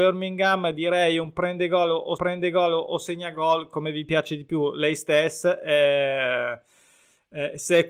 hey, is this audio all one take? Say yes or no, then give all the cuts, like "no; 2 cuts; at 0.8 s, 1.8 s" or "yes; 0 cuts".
no; 1 cut; at 2.2 s